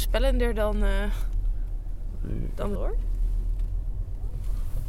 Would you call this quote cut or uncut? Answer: cut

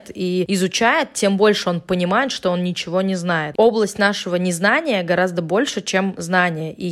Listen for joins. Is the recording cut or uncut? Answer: uncut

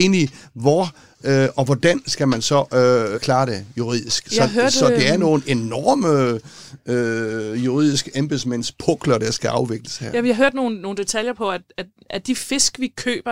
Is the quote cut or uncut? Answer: cut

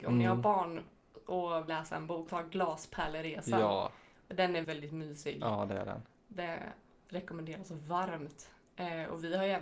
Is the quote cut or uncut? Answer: cut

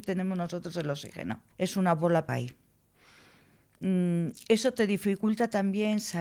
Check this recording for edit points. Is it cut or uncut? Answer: cut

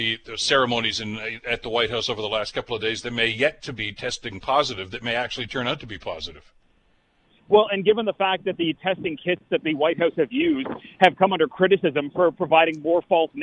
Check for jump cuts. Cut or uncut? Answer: uncut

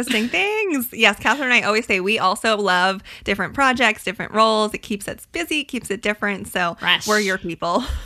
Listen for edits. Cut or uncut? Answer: uncut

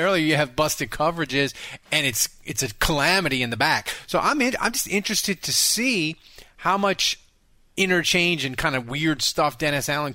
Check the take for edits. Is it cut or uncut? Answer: uncut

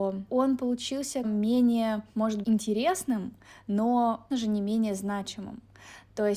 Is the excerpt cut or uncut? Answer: cut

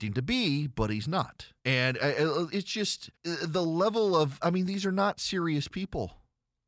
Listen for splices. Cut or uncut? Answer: cut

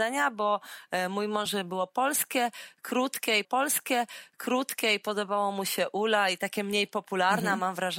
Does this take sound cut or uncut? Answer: cut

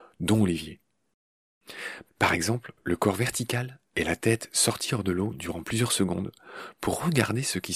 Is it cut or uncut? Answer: uncut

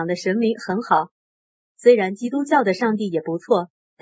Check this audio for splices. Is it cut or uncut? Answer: uncut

